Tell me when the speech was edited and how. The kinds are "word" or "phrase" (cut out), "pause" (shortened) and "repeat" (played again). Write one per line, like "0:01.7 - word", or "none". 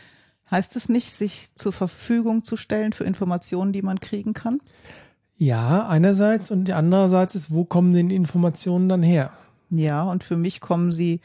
none